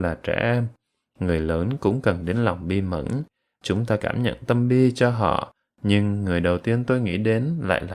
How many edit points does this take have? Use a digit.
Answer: 1